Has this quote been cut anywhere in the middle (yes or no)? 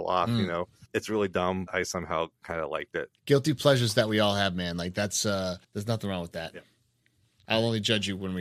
yes